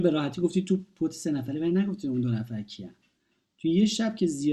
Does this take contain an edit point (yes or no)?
yes